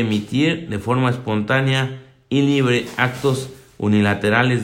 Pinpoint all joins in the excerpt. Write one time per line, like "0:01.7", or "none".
none

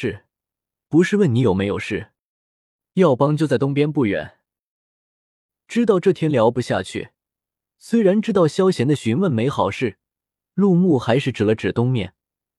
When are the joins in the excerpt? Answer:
none

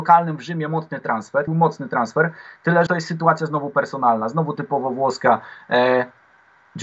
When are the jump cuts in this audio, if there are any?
0:01.5
0:02.9

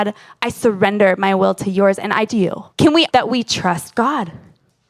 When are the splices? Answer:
0:02.3
0:02.7
0:03.1

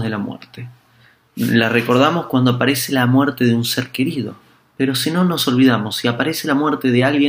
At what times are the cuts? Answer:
none

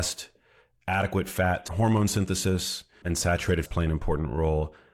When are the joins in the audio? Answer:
0:01.7
0:03.0
0:03.7

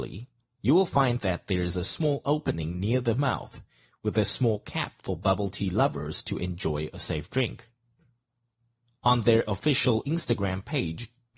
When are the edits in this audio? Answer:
none

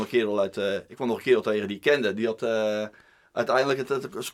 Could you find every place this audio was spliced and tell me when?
none

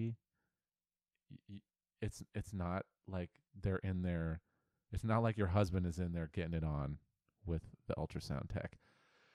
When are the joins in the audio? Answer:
none

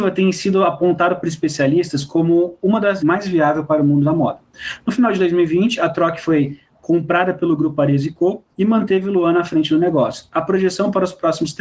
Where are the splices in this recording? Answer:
0:03.0
0:08.5

